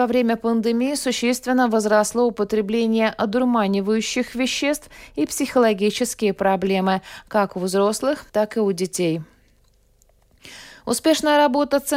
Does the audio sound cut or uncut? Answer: cut